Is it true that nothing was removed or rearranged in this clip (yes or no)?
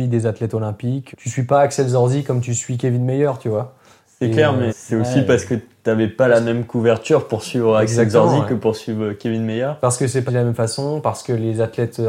no